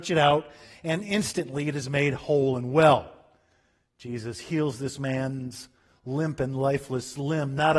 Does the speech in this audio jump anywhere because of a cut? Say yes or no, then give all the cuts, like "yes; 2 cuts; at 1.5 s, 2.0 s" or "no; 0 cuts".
no; 0 cuts